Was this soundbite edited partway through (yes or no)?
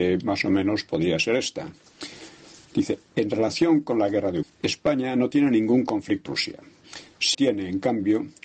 yes